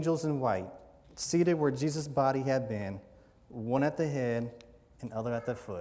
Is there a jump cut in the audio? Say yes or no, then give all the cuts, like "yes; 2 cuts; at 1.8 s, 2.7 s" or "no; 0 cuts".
no; 0 cuts